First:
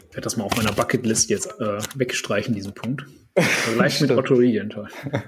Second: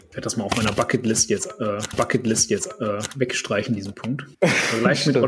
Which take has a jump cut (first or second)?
second